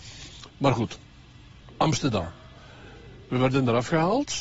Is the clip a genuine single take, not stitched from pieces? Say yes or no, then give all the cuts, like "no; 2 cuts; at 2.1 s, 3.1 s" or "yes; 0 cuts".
yes; 0 cuts